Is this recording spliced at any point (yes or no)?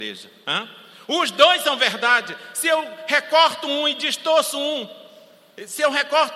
no